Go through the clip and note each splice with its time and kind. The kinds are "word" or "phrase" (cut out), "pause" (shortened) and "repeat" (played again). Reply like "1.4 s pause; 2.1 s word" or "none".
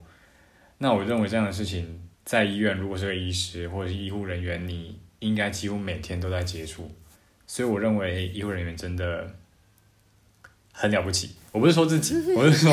2.1 s pause; 7.2 s pause